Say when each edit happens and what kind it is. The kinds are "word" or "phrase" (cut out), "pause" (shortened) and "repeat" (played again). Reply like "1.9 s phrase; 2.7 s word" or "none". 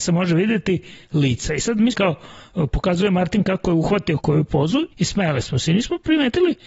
1.9 s phrase; 4.2 s word; 4.9 s pause